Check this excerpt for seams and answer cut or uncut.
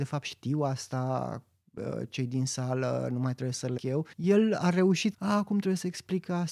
cut